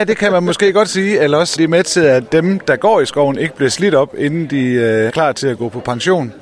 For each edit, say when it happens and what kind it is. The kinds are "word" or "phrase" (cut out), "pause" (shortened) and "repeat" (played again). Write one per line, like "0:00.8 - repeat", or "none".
0:01.6 - word
0:05.1 - word

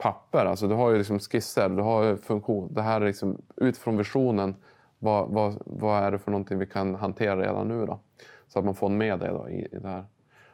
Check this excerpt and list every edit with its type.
none

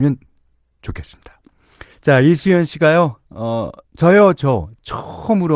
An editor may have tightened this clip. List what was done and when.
0:01.9 - pause
0:03.8 - pause

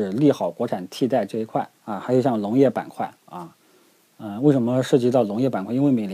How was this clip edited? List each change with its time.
0:01.8 - pause
0:03.2 - pause

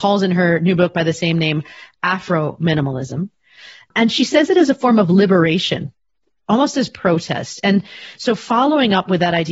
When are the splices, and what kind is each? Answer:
none

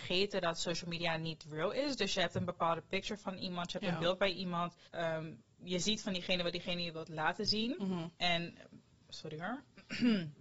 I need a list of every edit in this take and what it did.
0:04.9 - pause
0:08.2 - pause

